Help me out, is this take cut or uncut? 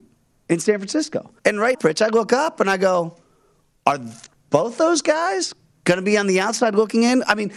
cut